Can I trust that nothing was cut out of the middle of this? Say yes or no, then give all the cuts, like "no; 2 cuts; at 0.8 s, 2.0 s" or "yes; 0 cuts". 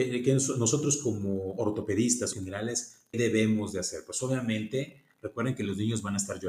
no; 2 cuts; at 2.3 s, 3.1 s